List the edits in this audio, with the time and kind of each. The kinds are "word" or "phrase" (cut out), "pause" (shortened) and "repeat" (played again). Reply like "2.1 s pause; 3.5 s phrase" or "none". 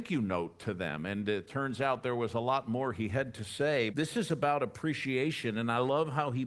3.9 s word

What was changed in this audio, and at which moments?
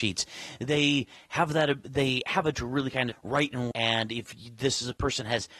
2.5 s word; 3.1 s word; 3.7 s word

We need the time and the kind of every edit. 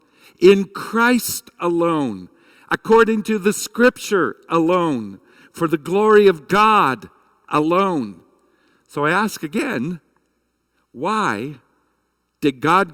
none

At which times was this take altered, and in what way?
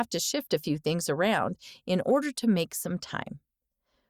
none

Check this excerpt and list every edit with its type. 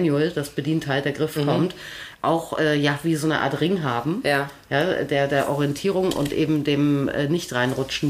none

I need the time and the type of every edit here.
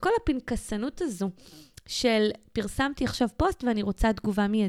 none

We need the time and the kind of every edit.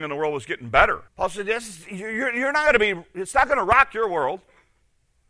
1.1 s pause

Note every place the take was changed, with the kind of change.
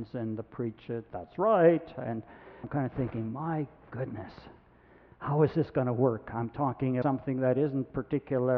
1.1 s word; 2.6 s word; 7.0 s word

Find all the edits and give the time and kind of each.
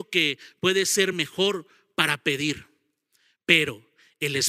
none

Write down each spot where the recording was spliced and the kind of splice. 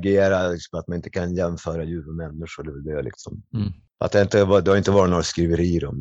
none

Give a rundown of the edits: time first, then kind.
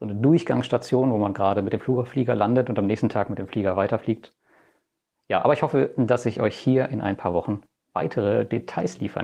none

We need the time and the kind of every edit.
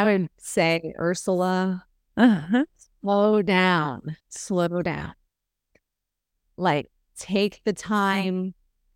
4.2 s pause

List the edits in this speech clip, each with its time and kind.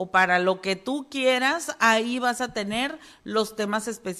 none

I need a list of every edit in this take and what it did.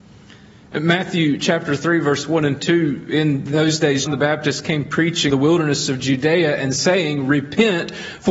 4.1 s word; 5.3 s word

